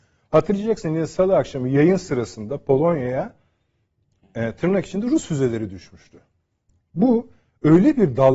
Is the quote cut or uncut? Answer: uncut